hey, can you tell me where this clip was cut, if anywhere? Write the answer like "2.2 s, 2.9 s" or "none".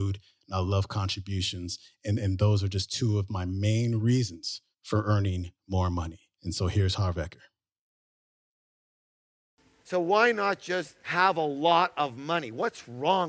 4.7 s, 6.3 s